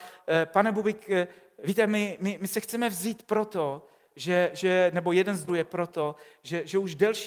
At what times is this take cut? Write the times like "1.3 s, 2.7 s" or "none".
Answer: 5.5 s